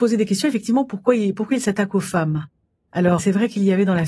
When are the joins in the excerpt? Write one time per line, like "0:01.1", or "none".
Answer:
0:03.2